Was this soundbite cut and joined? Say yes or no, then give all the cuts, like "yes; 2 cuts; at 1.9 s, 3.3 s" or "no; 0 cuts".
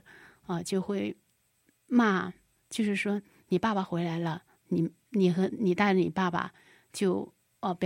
no; 0 cuts